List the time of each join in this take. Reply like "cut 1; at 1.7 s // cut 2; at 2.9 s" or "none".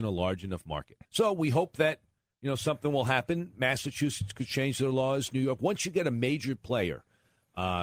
cut 1; at 1.0 s